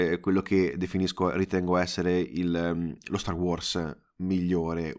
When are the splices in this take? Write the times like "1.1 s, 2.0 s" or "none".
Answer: none